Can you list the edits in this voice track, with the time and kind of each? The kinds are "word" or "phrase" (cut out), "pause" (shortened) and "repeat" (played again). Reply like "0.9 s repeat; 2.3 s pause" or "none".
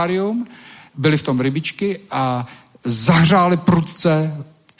0.9 s word